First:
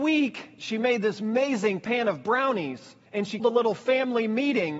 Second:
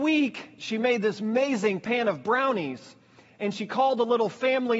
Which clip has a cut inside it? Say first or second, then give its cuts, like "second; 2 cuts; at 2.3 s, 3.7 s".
first; 2 cuts; at 3.1 s, 3.4 s